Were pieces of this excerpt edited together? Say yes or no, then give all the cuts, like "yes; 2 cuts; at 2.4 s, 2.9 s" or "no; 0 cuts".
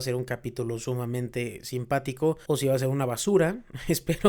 yes; 1 cut; at 2.5 s